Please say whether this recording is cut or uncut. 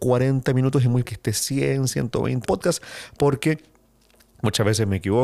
cut